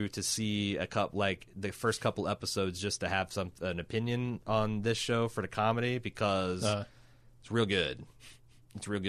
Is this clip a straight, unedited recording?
yes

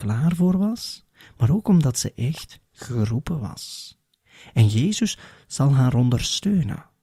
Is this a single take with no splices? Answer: yes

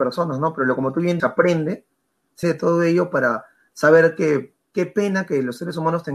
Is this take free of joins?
no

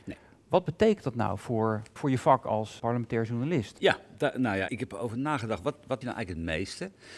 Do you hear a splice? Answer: yes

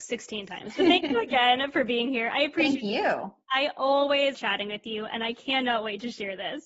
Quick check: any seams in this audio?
yes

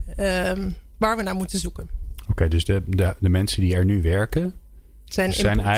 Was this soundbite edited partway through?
no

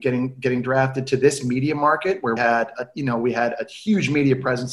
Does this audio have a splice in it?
yes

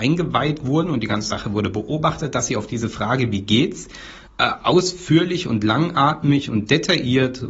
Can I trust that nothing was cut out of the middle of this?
no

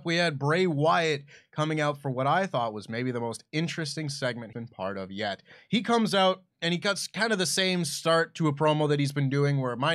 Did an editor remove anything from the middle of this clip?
yes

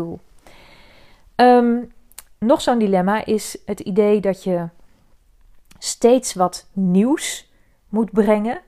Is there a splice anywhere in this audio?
no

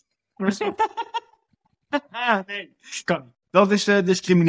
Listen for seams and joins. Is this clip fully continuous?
yes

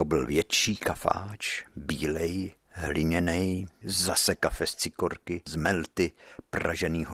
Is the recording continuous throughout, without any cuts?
yes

